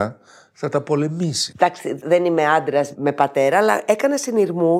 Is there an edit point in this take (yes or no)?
no